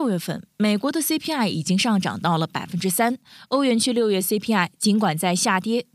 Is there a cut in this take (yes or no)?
no